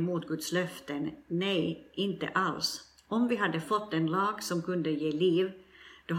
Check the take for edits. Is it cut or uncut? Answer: uncut